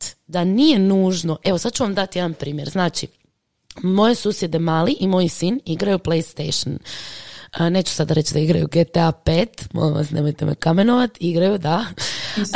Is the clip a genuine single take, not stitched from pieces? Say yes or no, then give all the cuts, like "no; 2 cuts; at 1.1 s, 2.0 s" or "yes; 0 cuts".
yes; 0 cuts